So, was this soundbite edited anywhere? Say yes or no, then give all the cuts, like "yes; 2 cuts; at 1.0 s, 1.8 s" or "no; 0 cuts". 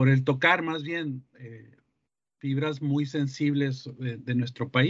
no; 0 cuts